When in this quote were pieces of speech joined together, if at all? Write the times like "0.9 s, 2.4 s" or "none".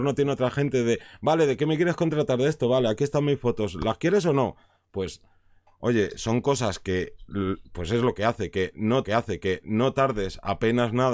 9.0 s

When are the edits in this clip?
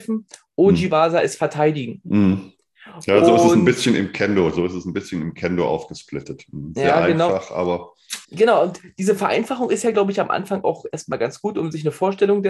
8.2 s

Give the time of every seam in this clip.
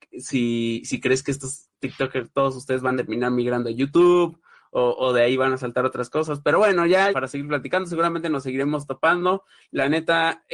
1.7 s, 3.0 s, 7.1 s

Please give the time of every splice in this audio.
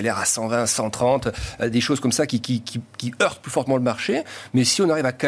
none

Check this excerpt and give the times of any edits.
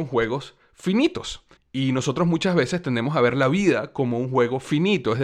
1.6 s

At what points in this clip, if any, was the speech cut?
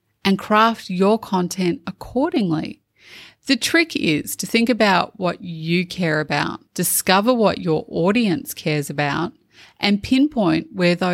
6.7 s

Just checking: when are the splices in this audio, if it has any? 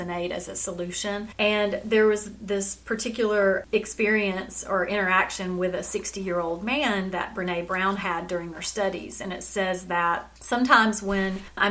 none

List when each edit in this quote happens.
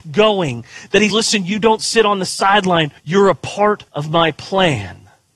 1.1 s, 3.0 s, 3.9 s

